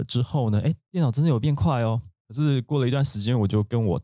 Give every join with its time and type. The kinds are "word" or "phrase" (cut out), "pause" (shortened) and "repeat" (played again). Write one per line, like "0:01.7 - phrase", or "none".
0:02.2 - pause